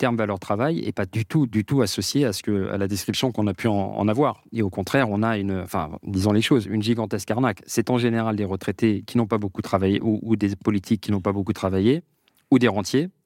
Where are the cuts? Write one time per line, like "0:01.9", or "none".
none